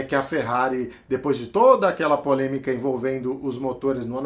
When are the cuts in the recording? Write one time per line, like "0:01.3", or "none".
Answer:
none